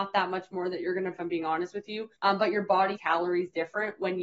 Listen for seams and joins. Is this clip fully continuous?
no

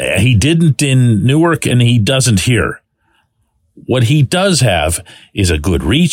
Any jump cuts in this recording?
no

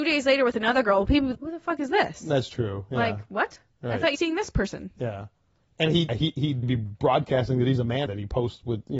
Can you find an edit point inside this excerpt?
yes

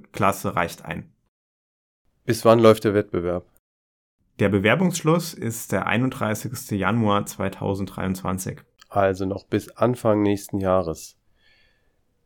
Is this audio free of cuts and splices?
yes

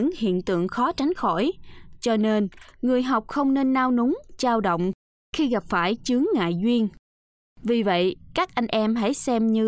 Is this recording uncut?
yes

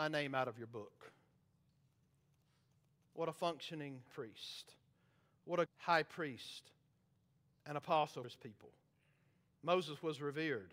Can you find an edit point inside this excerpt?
yes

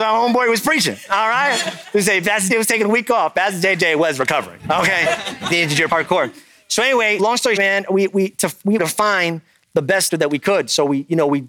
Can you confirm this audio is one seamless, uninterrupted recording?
no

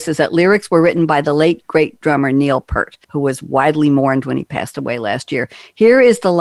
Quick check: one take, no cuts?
no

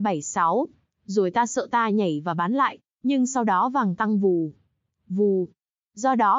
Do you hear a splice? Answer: no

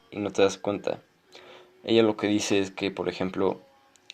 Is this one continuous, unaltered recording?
yes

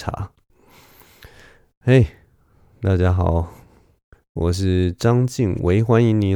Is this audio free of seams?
yes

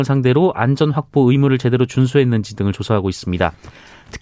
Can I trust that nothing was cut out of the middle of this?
yes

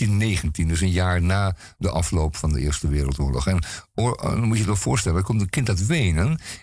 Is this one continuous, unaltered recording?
yes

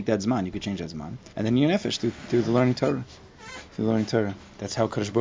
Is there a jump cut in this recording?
yes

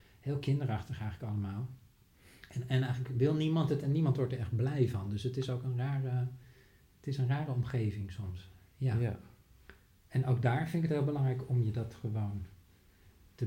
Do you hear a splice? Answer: no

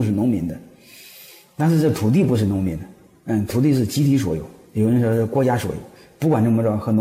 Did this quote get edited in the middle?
no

